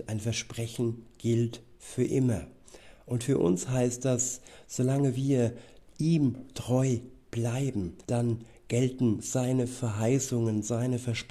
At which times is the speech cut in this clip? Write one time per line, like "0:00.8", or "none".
0:08.0

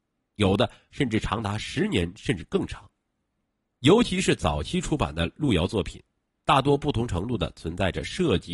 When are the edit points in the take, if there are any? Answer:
none

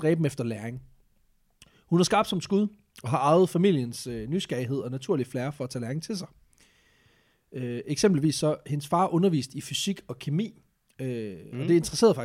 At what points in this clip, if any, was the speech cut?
none

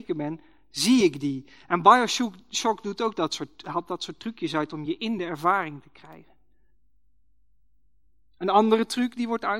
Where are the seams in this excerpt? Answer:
none

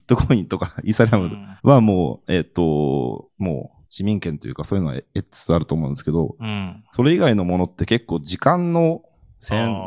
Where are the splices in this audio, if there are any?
0:01.6
0:03.9

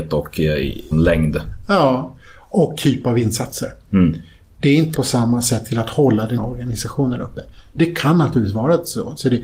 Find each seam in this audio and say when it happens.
0:00.9
0:02.7
0:04.9
0:06.4

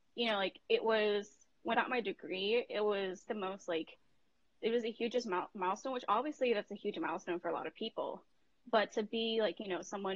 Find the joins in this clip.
0:01.7
0:03.3

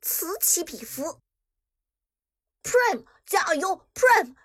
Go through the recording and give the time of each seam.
none

